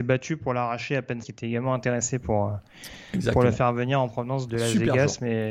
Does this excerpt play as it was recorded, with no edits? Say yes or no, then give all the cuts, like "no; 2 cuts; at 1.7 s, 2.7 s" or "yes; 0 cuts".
no; 2 cuts; at 1.2 s, 4.5 s